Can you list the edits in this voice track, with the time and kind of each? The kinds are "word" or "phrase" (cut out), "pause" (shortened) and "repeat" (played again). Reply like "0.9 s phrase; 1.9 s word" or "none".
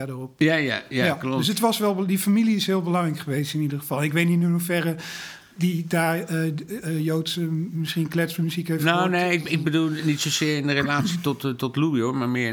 none